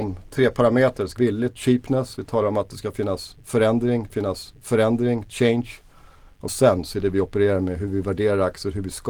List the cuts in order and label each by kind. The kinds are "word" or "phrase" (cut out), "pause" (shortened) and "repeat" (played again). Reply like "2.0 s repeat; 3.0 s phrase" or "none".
1.2 s word; 4.1 s repeat; 6.5 s phrase